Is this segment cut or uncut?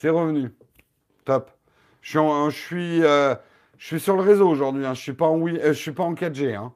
uncut